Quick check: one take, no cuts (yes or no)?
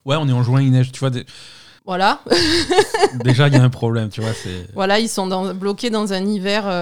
no